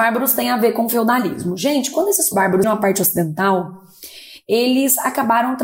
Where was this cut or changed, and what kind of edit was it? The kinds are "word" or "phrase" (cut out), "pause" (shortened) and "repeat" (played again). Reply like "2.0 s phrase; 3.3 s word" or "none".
2.3 s word; 2.6 s word